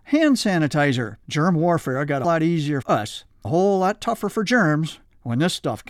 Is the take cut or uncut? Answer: cut